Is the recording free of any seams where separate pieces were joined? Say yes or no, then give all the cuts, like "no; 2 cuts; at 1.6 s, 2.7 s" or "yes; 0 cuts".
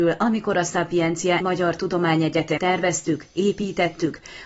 no; 2 cuts; at 1.4 s, 2.6 s